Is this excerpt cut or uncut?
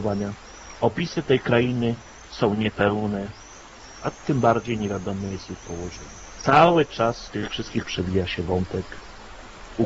cut